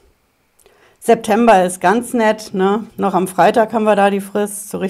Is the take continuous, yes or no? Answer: no